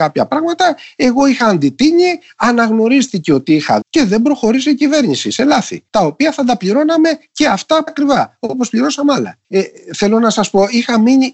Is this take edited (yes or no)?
yes